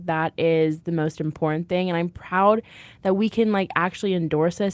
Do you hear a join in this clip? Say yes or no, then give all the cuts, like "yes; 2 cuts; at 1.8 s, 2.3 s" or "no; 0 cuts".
no; 0 cuts